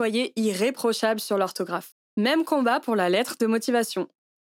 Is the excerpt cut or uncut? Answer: cut